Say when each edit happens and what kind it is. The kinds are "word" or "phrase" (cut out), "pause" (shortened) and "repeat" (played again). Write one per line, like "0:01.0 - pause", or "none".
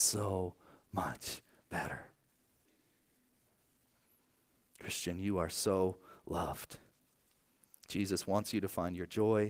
none